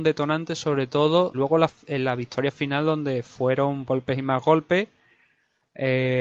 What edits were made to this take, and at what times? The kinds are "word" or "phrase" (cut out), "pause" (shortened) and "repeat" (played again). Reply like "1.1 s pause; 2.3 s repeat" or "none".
1.3 s word; 3.9 s word